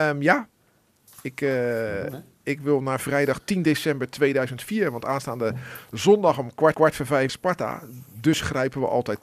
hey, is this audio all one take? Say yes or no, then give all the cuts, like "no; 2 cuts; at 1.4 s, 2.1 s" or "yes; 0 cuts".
no; 2 cuts; at 6.7 s, 7.3 s